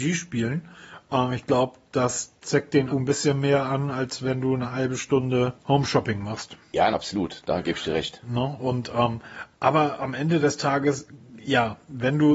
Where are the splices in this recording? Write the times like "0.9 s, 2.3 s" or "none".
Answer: 2.9 s, 5.6 s, 6.9 s

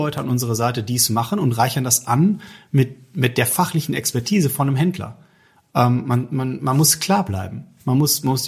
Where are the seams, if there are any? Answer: none

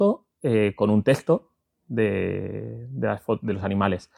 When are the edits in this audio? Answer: none

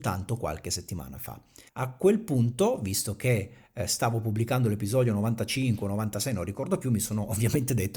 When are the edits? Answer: 1.7 s

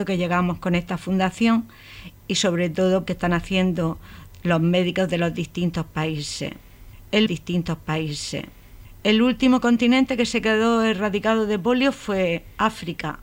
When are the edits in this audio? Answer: 2.2 s, 3.1 s, 7.3 s

